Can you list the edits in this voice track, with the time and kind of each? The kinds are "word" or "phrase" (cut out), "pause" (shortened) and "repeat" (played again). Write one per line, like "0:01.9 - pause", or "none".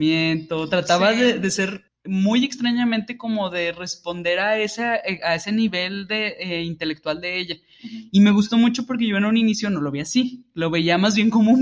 0:01.9 - pause